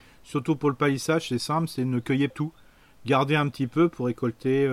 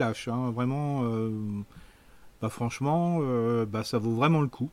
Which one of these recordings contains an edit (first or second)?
first